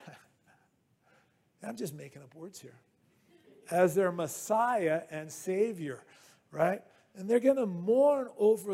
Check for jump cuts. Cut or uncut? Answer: uncut